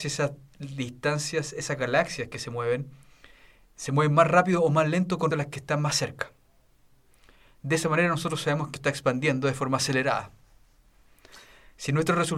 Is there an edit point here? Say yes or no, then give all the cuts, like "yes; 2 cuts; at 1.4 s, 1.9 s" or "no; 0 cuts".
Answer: yes; 2 cuts; at 5.3 s, 8.8 s